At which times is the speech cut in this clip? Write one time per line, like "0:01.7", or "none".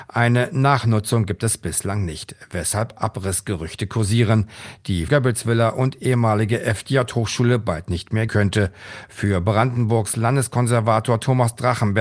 0:05.1
0:08.3